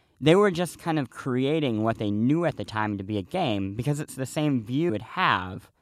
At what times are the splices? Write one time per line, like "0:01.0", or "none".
0:04.9